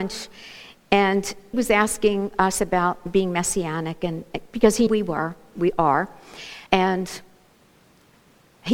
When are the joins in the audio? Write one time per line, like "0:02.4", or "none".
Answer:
0:01.5
0:04.9
0:06.7